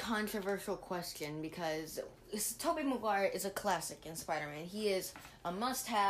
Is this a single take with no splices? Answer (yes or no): yes